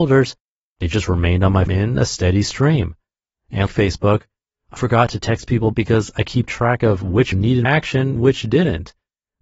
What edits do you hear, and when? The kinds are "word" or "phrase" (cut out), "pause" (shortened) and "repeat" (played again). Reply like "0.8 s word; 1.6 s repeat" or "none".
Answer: 1.7 s word; 3.7 s word; 4.8 s word; 5.7 s word; 6.2 s word; 7.3 s word; 7.6 s word; 8.2 s word